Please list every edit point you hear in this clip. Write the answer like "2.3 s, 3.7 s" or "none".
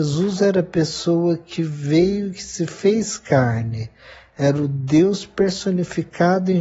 none